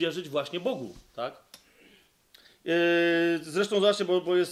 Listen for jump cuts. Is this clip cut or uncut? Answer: uncut